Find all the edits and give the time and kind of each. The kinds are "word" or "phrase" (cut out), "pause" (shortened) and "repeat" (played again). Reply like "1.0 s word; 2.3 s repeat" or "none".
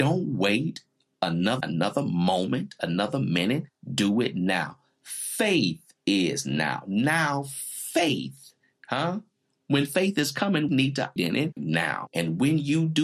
1.6 s word; 10.7 s word; 11.2 s word; 11.6 s word